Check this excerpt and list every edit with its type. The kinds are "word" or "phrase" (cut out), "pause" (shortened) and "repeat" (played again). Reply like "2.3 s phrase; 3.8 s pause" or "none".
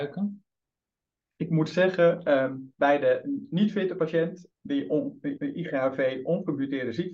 2.7 s pause; 4.5 s word; 5.4 s repeat